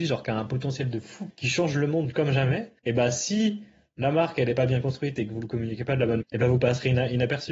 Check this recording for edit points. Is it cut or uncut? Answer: cut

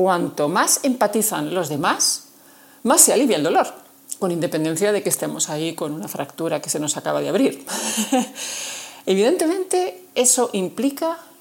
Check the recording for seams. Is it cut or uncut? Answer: uncut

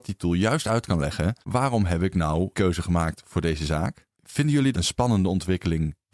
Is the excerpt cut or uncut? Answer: cut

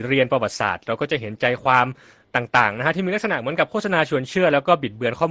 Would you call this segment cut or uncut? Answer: uncut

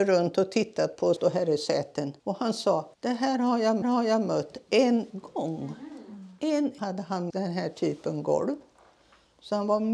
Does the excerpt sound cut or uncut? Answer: cut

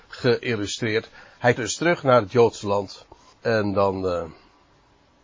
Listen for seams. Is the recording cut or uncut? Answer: cut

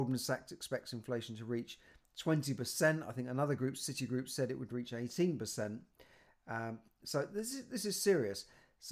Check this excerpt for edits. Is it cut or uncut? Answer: uncut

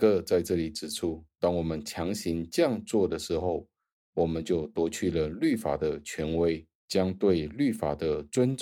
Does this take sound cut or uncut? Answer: uncut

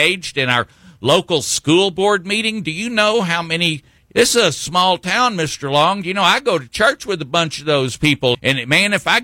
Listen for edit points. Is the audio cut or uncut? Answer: cut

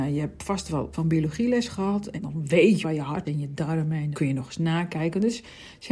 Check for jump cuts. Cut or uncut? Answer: cut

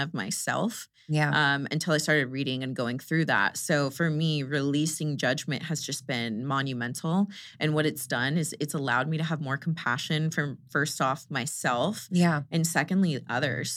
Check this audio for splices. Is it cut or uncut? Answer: uncut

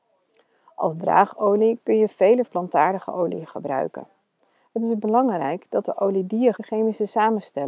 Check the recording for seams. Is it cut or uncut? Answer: cut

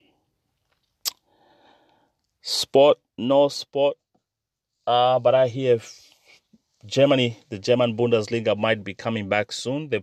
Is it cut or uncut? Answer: uncut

